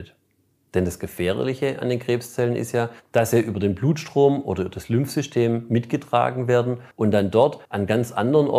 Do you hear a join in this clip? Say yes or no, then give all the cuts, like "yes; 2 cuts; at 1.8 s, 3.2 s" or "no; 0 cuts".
yes; 3 cuts; at 3.0 s, 6.9 s, 7.6 s